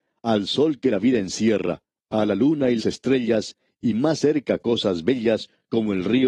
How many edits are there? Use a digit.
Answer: 1